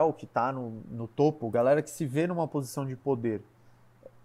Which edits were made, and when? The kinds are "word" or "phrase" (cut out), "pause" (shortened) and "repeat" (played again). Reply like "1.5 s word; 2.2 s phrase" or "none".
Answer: none